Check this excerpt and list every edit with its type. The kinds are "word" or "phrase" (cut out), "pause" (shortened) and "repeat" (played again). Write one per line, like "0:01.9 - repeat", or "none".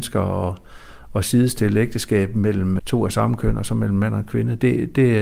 0:02.8 - word